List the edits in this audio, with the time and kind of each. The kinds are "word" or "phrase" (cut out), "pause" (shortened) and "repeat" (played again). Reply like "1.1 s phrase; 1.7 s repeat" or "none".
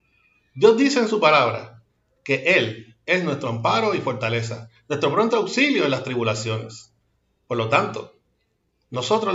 none